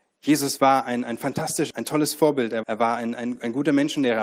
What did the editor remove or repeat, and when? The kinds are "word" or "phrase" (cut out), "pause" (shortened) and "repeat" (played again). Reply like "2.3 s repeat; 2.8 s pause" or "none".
1.7 s word; 2.6 s word

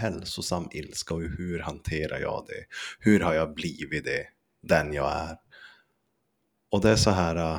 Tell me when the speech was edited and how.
none

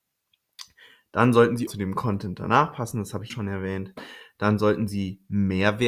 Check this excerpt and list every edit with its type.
1.7 s word; 3.3 s word

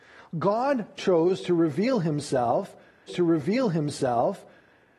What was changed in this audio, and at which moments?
3.1 s repeat

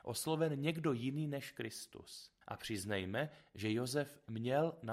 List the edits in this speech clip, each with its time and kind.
2.4 s pause

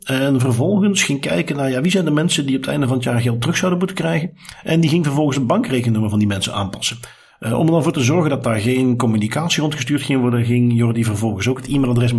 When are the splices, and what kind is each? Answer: none

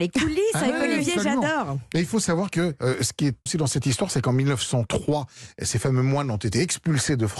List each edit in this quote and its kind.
3.5 s word

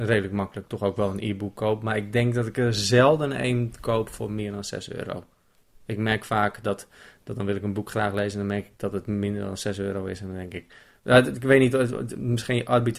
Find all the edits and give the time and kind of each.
none

